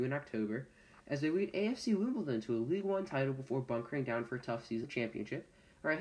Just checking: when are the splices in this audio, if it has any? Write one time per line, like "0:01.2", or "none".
0:04.8